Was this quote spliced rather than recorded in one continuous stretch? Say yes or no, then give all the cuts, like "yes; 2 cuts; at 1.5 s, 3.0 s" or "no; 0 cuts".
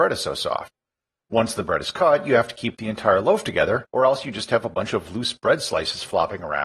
yes; 1 cut; at 3.9 s